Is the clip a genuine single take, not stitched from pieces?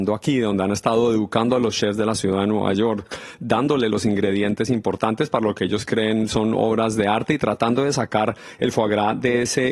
yes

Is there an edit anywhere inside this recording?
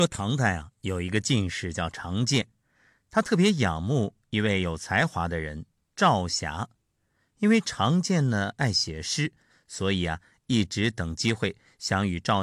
no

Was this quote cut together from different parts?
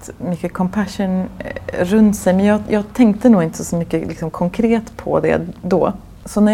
no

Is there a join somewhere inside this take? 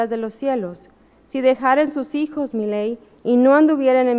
no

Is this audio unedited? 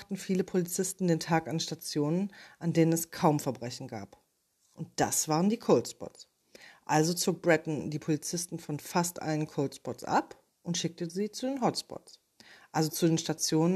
yes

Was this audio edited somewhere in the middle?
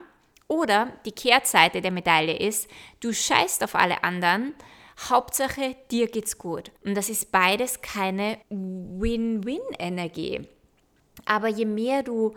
yes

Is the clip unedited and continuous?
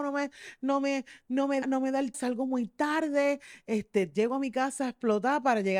no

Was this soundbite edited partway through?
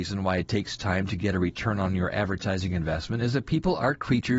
no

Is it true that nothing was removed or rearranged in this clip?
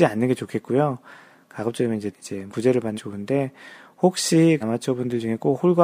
no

